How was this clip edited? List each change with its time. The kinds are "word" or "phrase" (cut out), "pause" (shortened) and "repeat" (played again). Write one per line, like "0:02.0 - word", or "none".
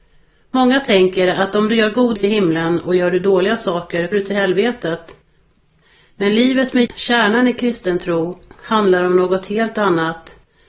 0:02.2 - phrase
0:04.1 - word
0:06.9 - word